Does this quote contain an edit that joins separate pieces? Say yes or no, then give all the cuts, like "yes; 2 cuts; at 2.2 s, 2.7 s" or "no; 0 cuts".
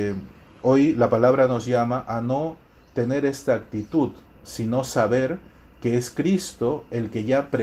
no; 0 cuts